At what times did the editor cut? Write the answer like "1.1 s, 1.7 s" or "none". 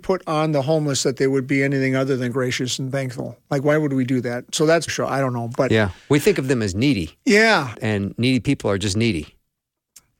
4.9 s, 7.7 s